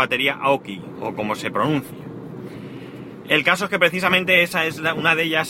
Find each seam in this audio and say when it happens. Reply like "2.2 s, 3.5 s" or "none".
none